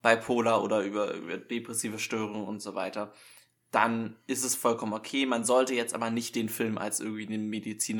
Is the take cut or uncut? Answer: uncut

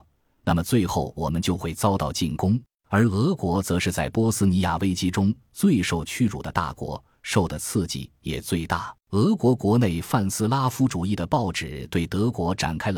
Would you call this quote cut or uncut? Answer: cut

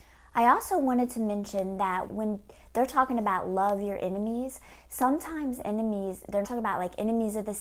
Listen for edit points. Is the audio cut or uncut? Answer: cut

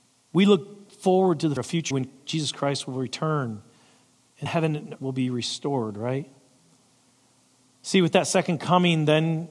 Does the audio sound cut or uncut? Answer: cut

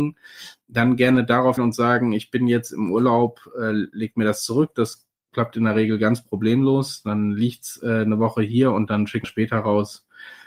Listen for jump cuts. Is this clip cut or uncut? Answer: cut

